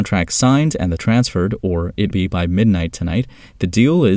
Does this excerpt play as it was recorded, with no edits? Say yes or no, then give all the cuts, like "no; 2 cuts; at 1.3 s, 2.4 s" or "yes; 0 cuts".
no; 2 cuts; at 1.0 s, 2.1 s